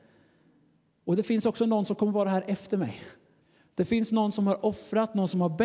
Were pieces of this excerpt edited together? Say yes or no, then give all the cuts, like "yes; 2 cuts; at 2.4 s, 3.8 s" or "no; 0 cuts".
yes; 1 cut; at 3.4 s